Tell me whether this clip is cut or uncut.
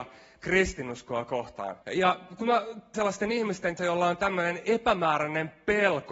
cut